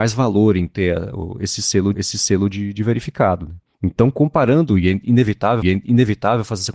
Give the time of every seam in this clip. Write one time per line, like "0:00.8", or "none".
0:01.9
0:03.7
0:05.6